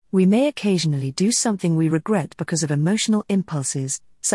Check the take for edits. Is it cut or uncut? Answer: uncut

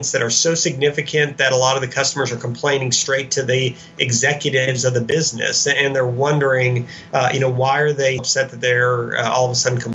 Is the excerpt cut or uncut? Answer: cut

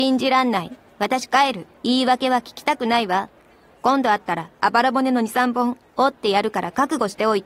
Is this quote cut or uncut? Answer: cut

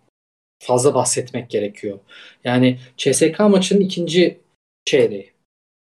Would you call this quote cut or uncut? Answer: uncut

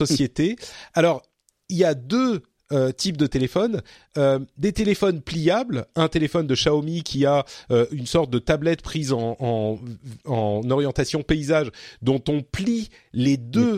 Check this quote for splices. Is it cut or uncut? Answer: uncut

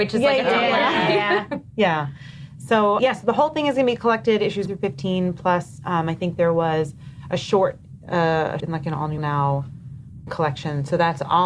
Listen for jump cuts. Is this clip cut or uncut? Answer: cut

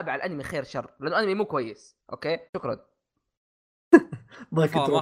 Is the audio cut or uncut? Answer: cut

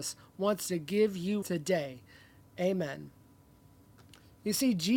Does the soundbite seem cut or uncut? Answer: cut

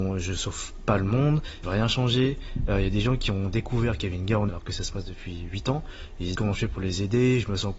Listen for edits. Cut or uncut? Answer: cut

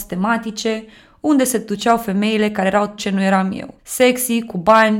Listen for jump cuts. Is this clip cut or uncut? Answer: cut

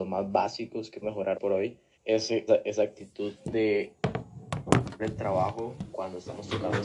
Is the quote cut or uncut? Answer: cut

